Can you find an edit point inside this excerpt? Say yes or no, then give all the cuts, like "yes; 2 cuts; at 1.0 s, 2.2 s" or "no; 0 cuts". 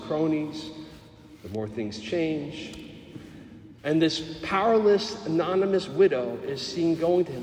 yes; 1 cut; at 3.8 s